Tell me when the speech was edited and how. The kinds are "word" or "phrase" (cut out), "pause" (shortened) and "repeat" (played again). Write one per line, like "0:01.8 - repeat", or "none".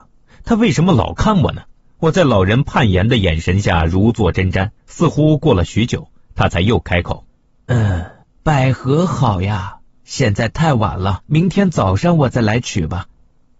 0:01.8 - pause
0:04.8 - pause
0:07.3 - pause
0:08.2 - pause
0:09.9 - pause
0:11.3 - pause